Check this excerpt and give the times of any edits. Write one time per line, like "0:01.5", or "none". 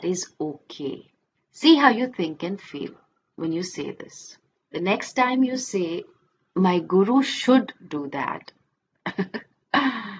none